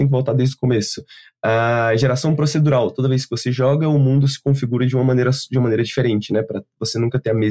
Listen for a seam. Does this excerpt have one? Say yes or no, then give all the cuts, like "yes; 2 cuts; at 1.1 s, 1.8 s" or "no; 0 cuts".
no; 0 cuts